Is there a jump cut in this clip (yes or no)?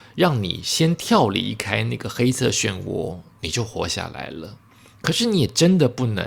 no